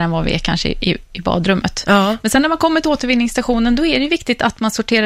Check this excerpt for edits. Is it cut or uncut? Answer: uncut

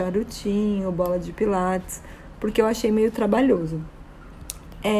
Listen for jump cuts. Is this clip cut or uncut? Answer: uncut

